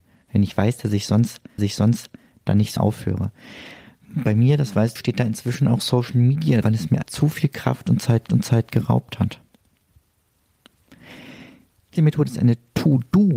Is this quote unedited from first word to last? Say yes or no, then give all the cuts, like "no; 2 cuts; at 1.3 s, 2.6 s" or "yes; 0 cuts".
no; 7 cuts; at 1.6 s, 2.8 s, 5.0 s, 6.6 s, 7.0 s, 8.3 s, 12.0 s